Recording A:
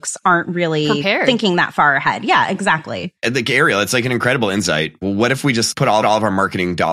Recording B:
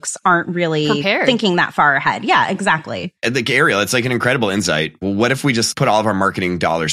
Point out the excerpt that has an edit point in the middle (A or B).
A